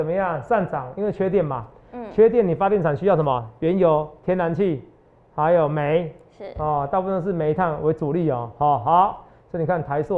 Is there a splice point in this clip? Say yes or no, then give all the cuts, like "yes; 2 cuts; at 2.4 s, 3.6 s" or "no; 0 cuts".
no; 0 cuts